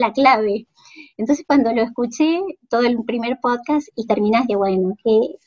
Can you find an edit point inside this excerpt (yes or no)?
yes